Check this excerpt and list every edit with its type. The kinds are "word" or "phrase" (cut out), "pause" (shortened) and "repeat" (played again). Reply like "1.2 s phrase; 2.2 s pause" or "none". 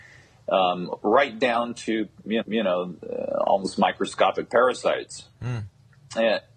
2.4 s repeat; 5.3 s pause